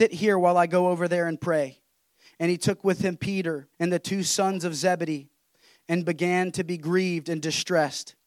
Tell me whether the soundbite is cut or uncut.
cut